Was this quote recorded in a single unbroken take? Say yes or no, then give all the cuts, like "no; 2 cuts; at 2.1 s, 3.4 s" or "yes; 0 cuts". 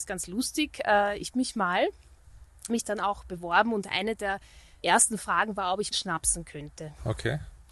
no; 4 cuts; at 1.3 s, 2.7 s, 4.8 s, 5.9 s